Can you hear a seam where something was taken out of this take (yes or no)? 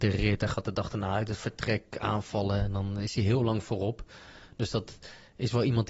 no